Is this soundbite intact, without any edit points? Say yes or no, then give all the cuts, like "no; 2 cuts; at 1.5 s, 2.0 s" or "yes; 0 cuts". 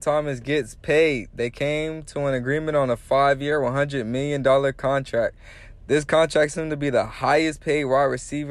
no; 1 cut; at 6.5 s